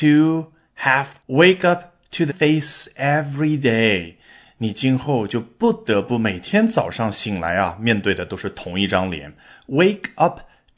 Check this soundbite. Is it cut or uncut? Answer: cut